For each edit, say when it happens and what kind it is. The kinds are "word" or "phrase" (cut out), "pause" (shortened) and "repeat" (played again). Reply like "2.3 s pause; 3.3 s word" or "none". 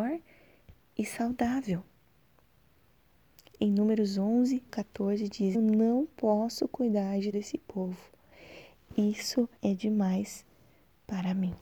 4.7 s word; 5.5 s phrase; 7.3 s word; 9.6 s pause